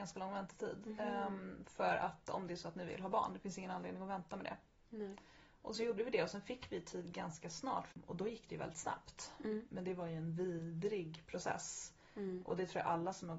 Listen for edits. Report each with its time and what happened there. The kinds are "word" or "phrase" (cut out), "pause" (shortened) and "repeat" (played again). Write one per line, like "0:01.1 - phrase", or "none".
none